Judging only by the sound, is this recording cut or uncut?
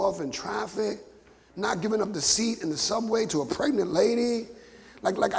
uncut